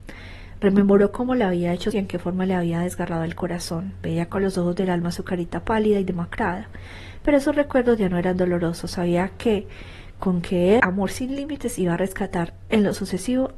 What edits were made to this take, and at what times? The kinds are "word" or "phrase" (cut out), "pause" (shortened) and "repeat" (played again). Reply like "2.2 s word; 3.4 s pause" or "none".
1.9 s word; 10.8 s word